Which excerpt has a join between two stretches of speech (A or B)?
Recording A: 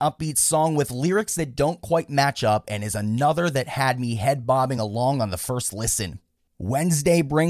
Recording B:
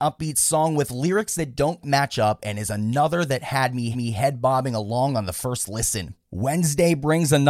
B